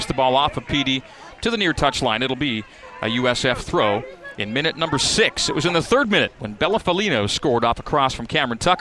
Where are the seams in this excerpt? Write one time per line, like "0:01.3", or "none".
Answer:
none